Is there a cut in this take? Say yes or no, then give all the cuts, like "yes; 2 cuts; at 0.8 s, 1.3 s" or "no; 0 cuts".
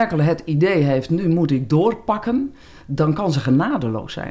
no; 0 cuts